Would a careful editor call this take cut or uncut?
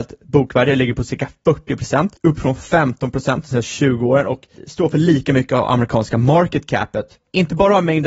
cut